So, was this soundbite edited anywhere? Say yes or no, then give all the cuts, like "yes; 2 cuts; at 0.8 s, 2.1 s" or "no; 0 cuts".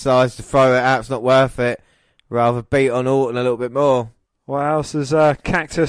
no; 0 cuts